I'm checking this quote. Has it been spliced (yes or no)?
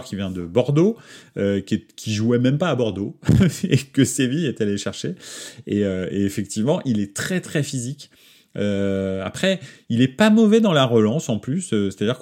no